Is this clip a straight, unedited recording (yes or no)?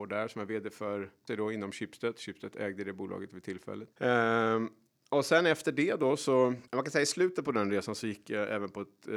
no